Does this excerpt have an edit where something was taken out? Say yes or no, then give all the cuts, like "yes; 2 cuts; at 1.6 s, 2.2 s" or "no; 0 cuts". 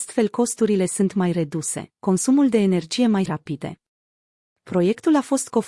yes; 1 cut; at 3.3 s